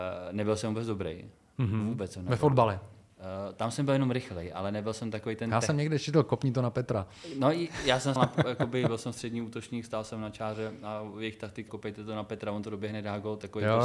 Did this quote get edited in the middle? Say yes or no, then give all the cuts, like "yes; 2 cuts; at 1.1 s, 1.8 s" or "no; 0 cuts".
yes; 2 cuts; at 8.2 s, 11.7 s